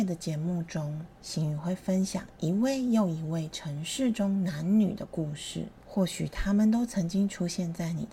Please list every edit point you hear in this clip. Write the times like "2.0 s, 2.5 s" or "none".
1.2 s, 5.8 s

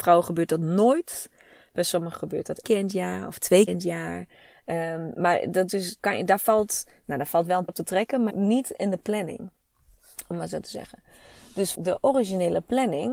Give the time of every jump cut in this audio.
2.2 s, 2.6 s, 3.7 s, 5.7 s, 6.0 s, 7.7 s, 8.3 s, 11.7 s

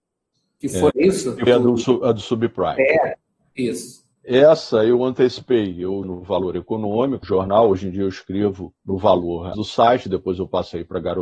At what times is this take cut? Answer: 0.9 s, 1.5 s, 6.0 s, 7.2 s, 8.8 s, 9.5 s

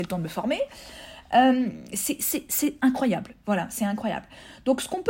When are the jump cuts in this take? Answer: none

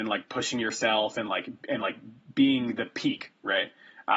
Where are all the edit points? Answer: none

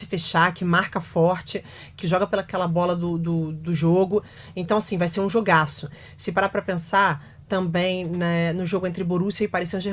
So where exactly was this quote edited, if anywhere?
2.0 s

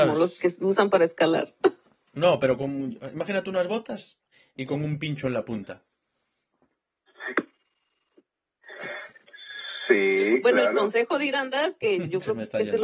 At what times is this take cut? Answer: none

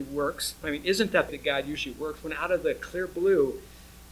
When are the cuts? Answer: 1.3 s

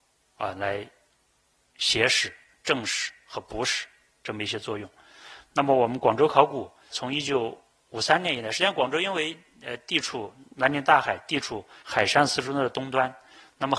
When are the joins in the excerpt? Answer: 6.9 s, 10.5 s, 11.8 s

